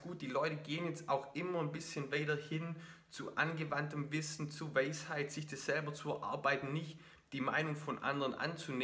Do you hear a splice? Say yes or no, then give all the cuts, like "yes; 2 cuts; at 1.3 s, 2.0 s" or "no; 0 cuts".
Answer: no; 0 cuts